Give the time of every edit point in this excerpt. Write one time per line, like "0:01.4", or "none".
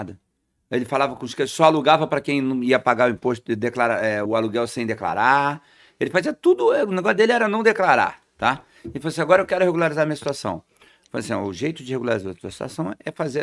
0:04.3